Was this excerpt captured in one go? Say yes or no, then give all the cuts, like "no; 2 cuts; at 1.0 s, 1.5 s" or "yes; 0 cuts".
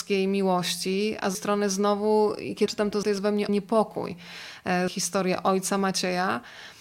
no; 5 cuts; at 1.3 s, 2.7 s, 3.0 s, 3.5 s, 4.9 s